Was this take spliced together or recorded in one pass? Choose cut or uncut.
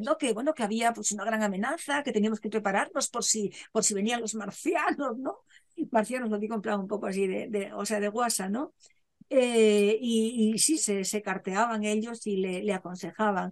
cut